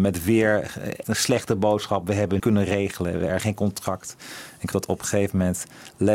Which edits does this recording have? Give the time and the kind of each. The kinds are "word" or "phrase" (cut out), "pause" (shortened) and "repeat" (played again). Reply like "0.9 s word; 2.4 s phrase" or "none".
1.0 s word; 2.4 s word; 3.4 s word; 4.7 s word